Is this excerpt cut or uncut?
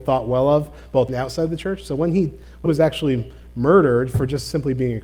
cut